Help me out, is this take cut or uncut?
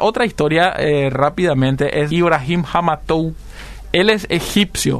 cut